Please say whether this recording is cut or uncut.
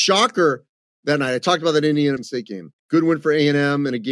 cut